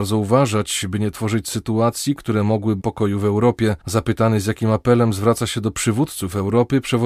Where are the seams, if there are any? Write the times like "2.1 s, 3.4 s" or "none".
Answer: 2.8 s, 3.8 s